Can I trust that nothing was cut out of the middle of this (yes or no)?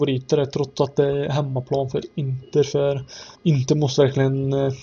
no